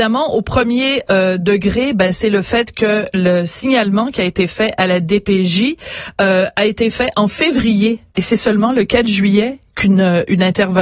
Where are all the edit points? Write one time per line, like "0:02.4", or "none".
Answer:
0:08.1
0:09.7

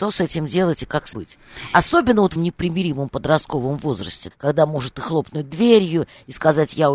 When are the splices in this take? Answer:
0:01.1
0:02.4
0:04.3

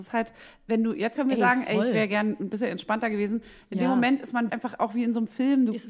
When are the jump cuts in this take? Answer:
0:01.2
0:04.5

